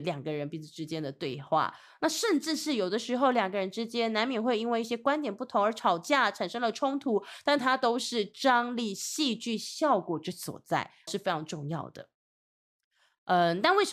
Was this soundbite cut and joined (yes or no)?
yes